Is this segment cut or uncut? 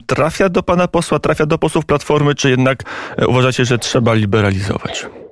uncut